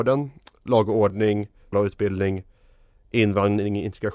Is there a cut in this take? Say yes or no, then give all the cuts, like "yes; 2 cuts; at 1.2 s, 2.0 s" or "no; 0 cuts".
yes; 1 cut; at 1.7 s